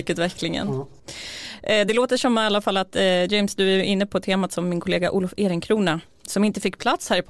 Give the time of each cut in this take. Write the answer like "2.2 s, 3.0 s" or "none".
none